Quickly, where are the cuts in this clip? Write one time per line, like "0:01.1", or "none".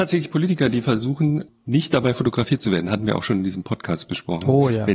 none